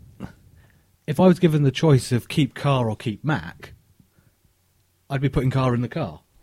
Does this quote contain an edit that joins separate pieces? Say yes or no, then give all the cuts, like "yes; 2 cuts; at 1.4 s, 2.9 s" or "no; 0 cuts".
no; 0 cuts